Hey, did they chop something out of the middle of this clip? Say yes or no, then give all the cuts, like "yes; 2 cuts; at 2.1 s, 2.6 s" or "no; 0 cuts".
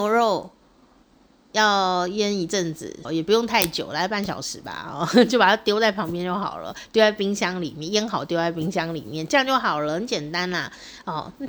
yes; 1 cut; at 3.0 s